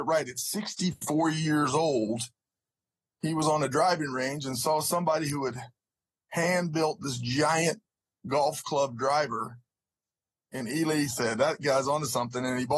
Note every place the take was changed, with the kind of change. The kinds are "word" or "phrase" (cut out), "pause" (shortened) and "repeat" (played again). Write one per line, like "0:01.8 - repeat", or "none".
none